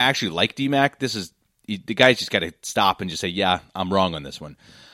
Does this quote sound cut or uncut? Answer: uncut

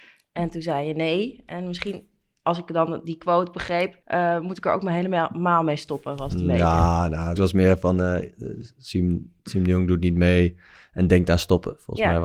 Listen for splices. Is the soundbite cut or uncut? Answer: cut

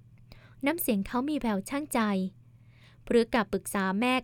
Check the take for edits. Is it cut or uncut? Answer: uncut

